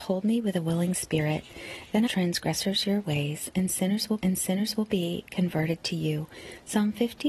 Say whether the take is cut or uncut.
cut